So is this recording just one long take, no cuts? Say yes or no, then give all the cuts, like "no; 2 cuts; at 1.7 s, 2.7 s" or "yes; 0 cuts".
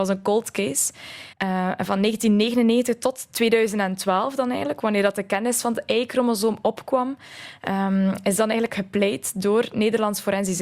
no; 1 cut; at 1.3 s